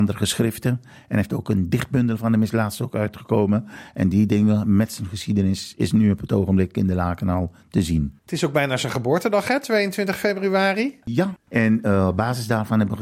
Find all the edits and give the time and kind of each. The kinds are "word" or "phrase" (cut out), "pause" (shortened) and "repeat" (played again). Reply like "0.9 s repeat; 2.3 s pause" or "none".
none